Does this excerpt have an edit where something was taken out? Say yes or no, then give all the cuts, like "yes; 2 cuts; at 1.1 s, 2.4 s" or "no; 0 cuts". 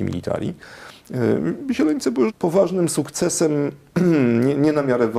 yes; 1 cut; at 2.3 s